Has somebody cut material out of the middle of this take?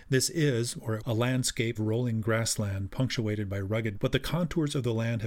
yes; 3 cuts; at 1.0 s, 1.8 s, 3.9 s

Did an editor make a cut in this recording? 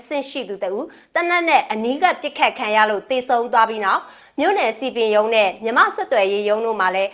no; 0 cuts

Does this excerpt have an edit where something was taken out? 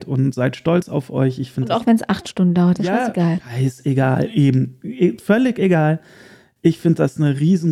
no; 0 cuts

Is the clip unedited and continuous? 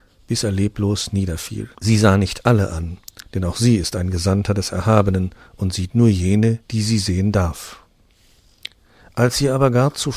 no; 2 cuts; at 1.7 s, 6.6 s

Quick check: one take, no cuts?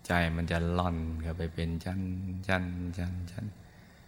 yes; 0 cuts

